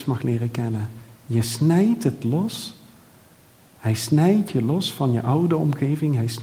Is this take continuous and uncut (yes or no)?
yes